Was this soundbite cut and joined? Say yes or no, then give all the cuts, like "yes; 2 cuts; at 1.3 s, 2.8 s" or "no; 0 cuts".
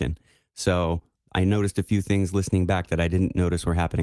no; 0 cuts